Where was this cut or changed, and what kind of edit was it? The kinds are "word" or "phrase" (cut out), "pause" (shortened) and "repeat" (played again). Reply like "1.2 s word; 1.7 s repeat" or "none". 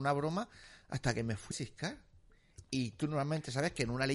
1.5 s word